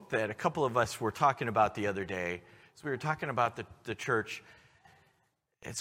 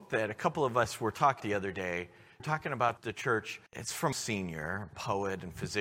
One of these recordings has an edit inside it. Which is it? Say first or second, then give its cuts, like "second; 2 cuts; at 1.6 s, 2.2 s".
second; 5 cuts; at 1.4 s, 2.4 s, 3.0 s, 3.7 s, 4.1 s